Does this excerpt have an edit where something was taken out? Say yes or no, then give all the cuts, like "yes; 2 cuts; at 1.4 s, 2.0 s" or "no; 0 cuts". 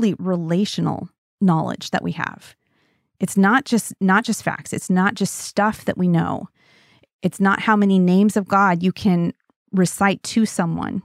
no; 0 cuts